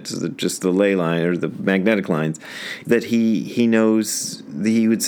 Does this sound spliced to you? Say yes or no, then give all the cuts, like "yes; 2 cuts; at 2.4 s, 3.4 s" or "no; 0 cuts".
yes; 1 cut; at 2.8 s